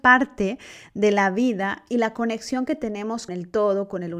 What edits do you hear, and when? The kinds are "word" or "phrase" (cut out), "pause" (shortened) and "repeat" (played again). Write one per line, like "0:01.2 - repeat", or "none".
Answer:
0:03.3 - word